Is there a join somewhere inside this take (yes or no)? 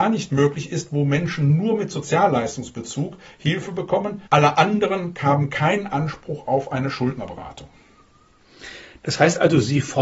yes